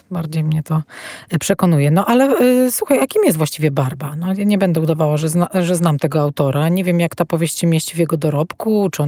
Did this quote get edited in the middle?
no; 0 cuts

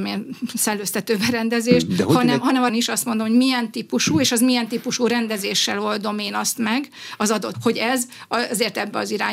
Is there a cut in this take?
yes; 2 cuts; at 2.7 s, 7.5 s

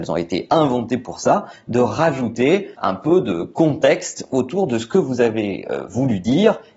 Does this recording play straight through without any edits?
no; 1 cut; at 2.7 s

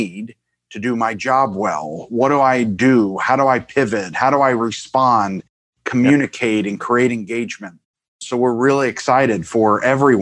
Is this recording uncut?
yes; 0 cuts

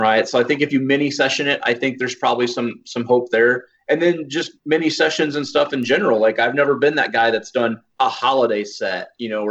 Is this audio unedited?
no; 2 cuts; at 4.6 s, 7.9 s

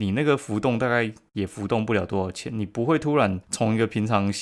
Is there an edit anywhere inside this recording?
yes; 1 cut; at 3.4 s

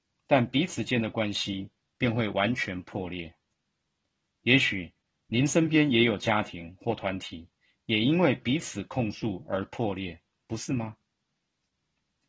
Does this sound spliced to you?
no; 0 cuts

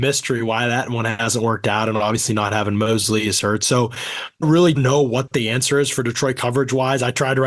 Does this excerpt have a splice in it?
yes; 2 cuts; at 4.4 s, 4.7 s

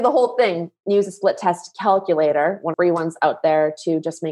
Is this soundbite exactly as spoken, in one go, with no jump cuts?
no; 1 cut; at 2.7 s

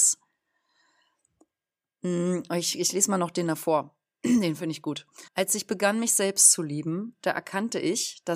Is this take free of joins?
no; 1 cut; at 5.3 s

